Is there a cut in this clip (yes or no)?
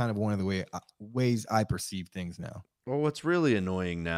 no